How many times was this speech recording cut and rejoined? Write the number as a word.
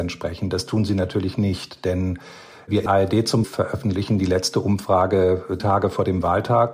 three